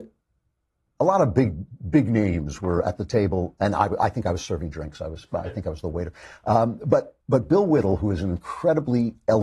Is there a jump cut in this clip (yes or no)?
yes